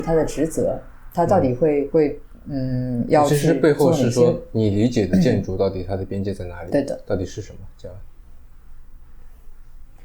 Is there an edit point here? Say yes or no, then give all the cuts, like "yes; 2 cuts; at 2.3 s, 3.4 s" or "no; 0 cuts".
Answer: yes; 1 cut; at 1.9 s